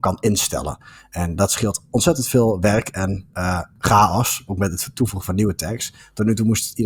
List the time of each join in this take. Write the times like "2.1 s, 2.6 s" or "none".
none